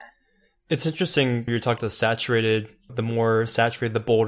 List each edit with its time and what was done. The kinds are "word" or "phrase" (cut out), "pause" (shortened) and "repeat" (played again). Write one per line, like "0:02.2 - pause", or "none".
0:01.5 - word
0:01.8 - word
0:02.9 - word